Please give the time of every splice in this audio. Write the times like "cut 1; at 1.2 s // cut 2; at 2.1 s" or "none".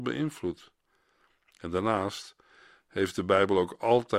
none